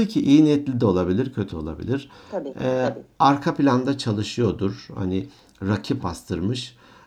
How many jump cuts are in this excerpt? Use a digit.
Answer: 2